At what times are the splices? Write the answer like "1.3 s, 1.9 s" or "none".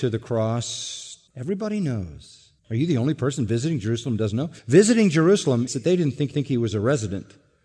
1.3 s, 2.6 s, 4.6 s, 5.7 s, 6.3 s